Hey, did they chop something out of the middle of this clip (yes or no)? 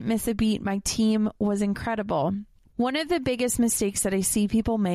no